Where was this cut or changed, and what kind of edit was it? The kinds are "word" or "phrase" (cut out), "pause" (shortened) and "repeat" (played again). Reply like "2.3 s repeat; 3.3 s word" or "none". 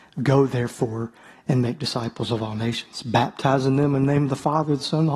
none